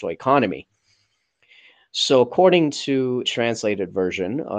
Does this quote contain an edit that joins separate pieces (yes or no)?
yes